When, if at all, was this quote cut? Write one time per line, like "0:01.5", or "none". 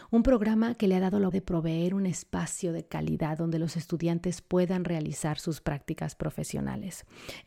0:01.3